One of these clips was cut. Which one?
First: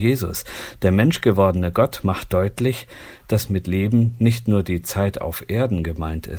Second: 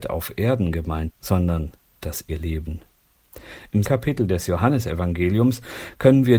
second; 3 cuts; at 1.1 s, 2.3 s, 3.9 s

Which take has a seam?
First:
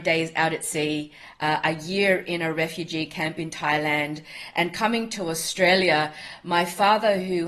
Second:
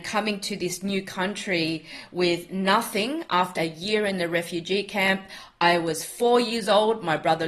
second; 1 cut; at 3.6 s

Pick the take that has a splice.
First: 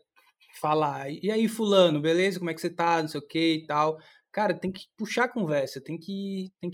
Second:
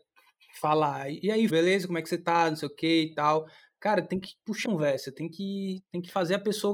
second; 2 cuts; at 1.5 s, 4.6 s

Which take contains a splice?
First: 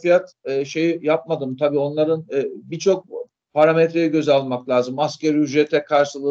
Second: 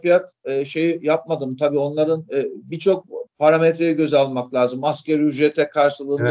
second; 1 cut; at 3.3 s

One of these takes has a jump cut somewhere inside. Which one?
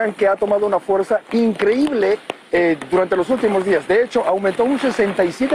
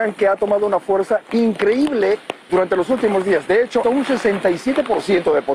second; 2 cuts; at 2.5 s, 3.8 s

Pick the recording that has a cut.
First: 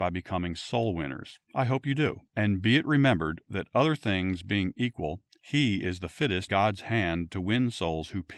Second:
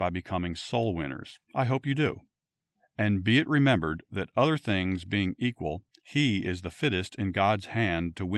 first; 2 cuts; at 2.3 s, 6.5 s

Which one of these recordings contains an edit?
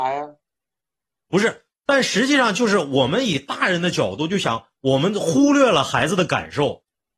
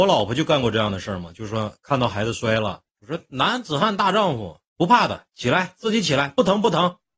second; 2 cuts; at 2.9 s, 4.7 s

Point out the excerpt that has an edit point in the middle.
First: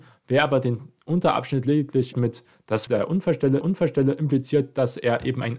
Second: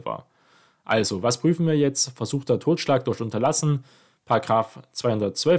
first; 3 cuts; at 2.1 s, 2.9 s, 3.6 s

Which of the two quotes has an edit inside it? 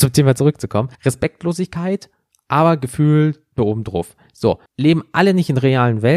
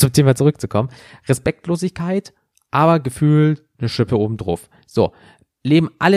first; 3 cuts; at 0.9 s, 3.6 s, 4.7 s

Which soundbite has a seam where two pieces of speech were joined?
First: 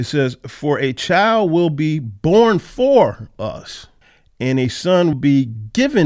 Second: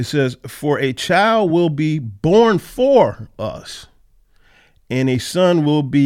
first; 2 cuts; at 4.0 s, 5.1 s

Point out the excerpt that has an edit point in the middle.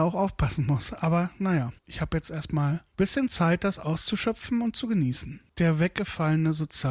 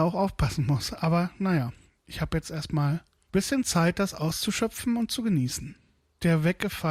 first; 3 cuts; at 1.8 s, 2.9 s, 5.5 s

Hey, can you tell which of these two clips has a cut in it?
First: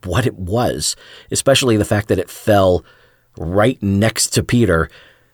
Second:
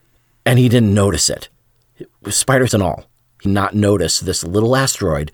second; 2 cuts; at 2.7 s, 3.4 s

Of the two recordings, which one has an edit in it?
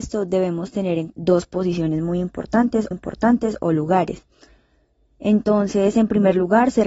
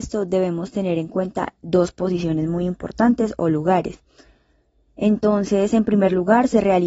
first; 2 cuts; at 1.1 s, 2.9 s

